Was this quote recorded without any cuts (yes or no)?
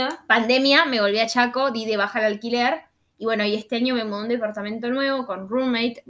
yes